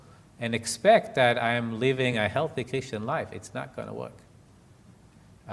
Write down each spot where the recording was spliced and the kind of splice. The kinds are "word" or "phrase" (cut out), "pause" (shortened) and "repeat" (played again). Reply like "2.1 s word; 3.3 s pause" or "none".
none